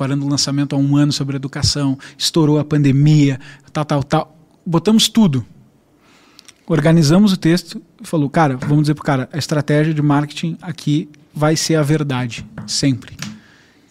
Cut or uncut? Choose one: uncut